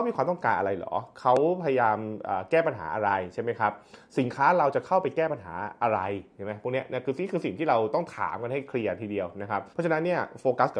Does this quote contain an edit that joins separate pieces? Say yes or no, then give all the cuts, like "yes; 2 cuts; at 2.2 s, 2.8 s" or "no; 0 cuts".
yes; 1 cut; at 9.7 s